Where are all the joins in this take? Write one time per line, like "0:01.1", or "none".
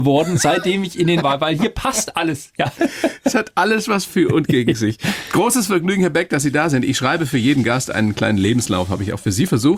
0:01.2